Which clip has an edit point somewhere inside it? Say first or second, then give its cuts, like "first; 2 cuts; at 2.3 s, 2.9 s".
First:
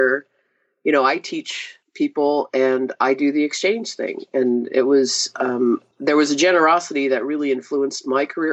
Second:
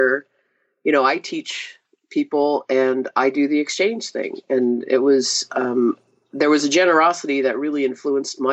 first; 2 cuts; at 1.8 s, 5.9 s